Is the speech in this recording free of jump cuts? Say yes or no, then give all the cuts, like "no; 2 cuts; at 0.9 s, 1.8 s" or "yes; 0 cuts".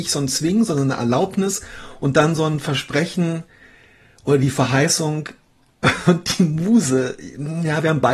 yes; 0 cuts